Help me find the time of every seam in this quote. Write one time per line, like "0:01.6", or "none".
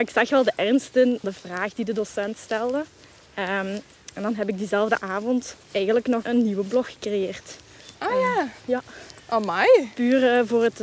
0:01.2
0:05.6
0:06.2